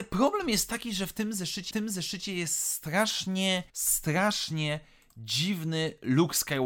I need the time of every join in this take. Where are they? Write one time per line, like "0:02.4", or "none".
0:01.7
0:03.7